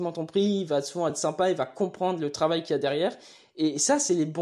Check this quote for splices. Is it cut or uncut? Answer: uncut